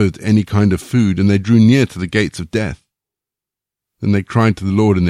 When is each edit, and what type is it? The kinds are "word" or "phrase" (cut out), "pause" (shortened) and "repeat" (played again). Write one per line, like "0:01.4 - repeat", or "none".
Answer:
none

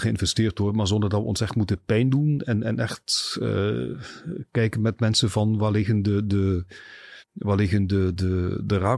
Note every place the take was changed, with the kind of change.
0:07.2 - pause

